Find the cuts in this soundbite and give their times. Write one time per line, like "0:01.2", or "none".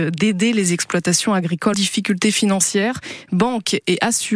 0:01.7